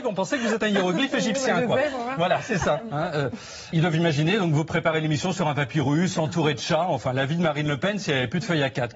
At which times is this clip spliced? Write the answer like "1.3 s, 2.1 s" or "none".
3.7 s